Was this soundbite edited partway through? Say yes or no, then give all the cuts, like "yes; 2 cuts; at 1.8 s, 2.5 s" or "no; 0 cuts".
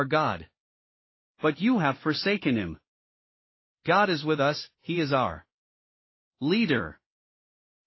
no; 0 cuts